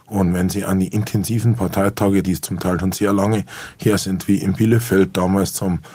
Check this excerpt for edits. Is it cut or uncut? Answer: cut